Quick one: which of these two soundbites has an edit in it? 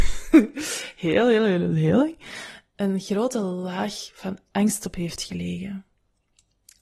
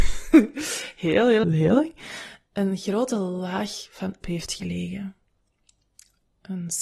second; 2 cuts; at 1.4 s, 4.2 s

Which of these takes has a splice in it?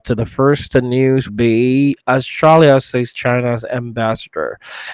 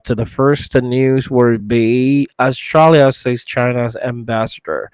first; 1 cut; at 1.3 s

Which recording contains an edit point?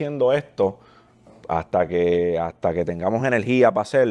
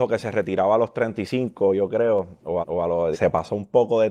second; 2 cuts; at 2.6 s, 3.1 s

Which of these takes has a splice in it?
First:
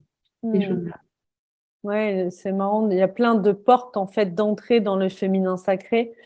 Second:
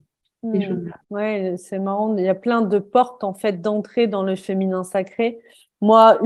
second; 1 cut; at 1.0 s

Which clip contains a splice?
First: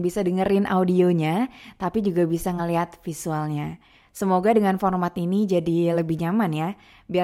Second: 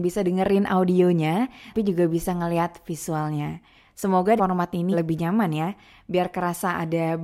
second; 3 cuts; at 1.7 s, 4.4 s, 4.9 s

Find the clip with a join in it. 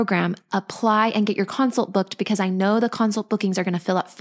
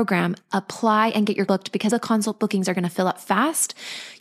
second; 2 cuts; at 1.5 s, 1.9 s

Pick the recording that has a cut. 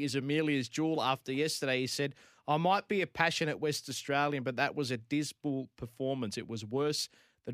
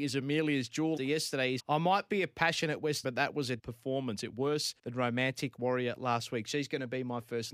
second; 6 cuts; at 1.0 s, 1.6 s, 3.0 s, 3.6 s, 4.3 s, 4.8 s

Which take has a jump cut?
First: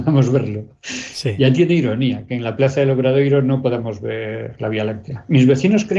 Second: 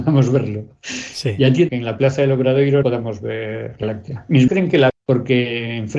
second; 5 cuts; at 1.7 s, 2.8 s, 3.8 s, 4.5 s, 4.9 s

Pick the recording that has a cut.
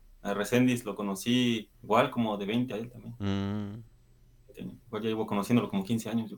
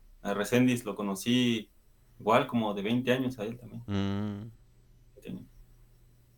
first; 3 cuts; at 1.7 s, 2.7 s, 4.8 s

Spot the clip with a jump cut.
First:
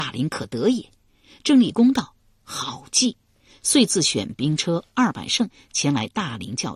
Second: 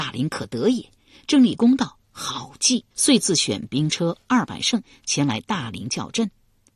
second; 3 cuts; at 1.0 s, 2.0 s, 2.9 s

